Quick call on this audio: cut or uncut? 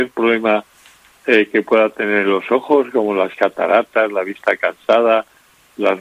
uncut